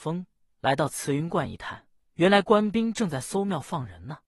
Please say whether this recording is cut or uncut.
cut